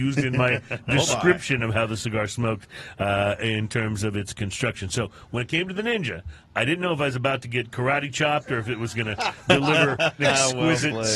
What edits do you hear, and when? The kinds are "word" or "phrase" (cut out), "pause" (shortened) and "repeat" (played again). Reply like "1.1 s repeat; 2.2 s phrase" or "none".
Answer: 10.2 s word